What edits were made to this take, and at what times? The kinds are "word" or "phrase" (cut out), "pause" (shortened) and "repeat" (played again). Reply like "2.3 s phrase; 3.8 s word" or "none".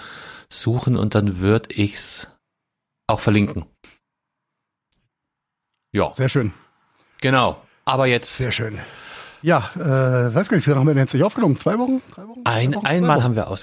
none